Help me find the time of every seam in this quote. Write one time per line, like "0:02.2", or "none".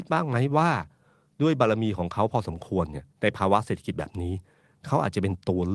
0:03.1